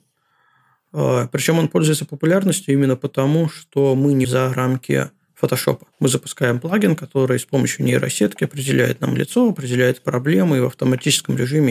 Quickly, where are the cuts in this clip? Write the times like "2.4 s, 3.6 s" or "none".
4.2 s, 5.9 s